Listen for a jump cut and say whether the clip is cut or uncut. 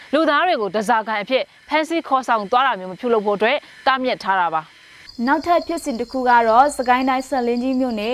uncut